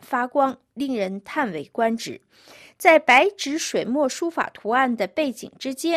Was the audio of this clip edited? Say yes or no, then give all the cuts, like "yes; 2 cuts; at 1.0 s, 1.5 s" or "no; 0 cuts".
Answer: no; 0 cuts